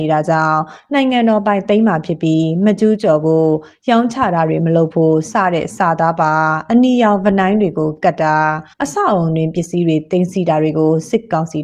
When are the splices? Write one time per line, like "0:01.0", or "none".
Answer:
0:08.7